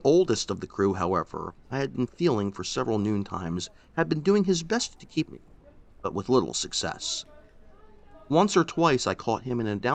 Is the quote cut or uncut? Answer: cut